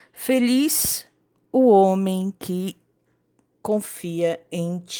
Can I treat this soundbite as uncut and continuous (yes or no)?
yes